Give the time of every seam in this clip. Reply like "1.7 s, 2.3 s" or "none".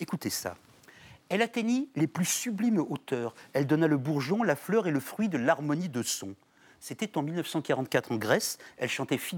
none